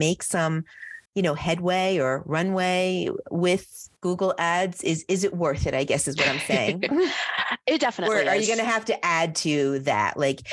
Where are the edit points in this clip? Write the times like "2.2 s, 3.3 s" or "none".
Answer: 1.1 s, 4.0 s